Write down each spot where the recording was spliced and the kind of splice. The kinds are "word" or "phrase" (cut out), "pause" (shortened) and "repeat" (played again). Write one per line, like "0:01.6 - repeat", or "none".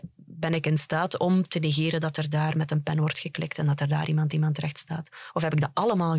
0:04.3 - repeat